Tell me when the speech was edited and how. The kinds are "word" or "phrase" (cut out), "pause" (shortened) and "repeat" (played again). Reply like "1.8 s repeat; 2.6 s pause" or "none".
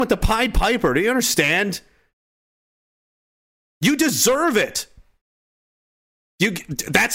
none

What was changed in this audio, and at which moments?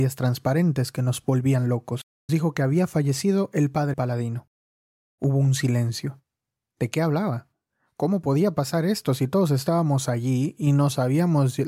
2.3 s word; 3.9 s word

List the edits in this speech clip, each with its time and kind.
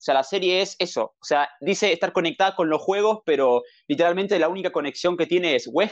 none

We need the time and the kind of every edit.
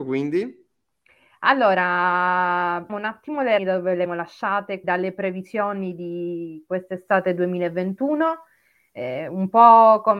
2.9 s word; 3.6 s word; 4.1 s word; 4.8 s word

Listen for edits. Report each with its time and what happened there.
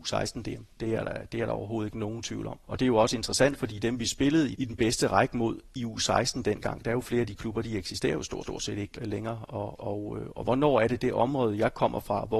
2.6 s pause; 4.5 s word; 8.4 s repeat; 8.9 s word; 9.8 s word

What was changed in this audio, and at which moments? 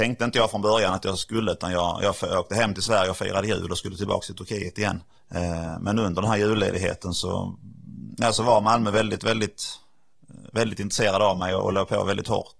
5.2 s pause

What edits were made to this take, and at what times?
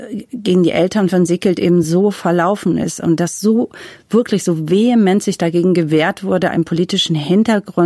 none

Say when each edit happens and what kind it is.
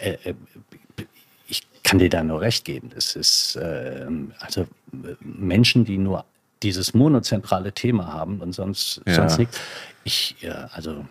none

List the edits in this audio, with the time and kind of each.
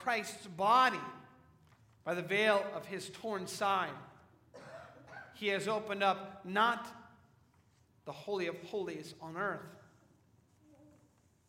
1.7 s pause

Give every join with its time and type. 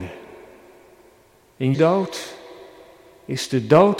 1.7 s word

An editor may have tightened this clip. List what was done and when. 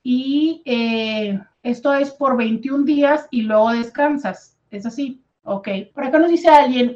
1.5 s pause; 5.9 s pause

